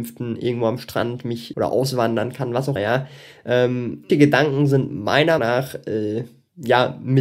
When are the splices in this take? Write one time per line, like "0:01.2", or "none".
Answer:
0:01.5
0:02.8
0:04.1
0:05.4